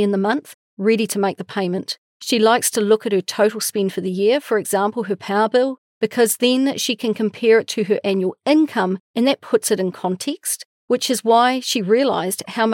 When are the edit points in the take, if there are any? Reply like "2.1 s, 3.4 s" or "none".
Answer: 2.1 s, 9.0 s